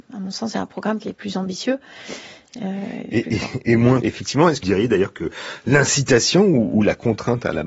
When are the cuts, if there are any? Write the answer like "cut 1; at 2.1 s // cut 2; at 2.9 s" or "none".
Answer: cut 1; at 1.1 s // cut 2; at 3.6 s // cut 3; at 4.0 s // cut 4; at 4.6 s